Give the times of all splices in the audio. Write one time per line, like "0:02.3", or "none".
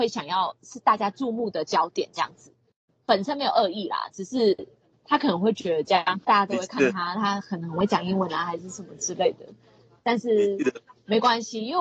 none